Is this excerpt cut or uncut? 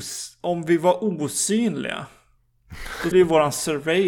cut